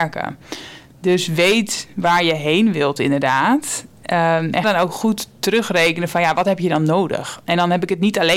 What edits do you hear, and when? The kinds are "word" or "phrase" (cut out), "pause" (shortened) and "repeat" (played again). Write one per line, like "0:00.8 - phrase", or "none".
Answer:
0:04.6 - word